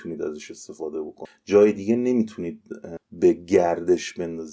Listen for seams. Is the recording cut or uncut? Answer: uncut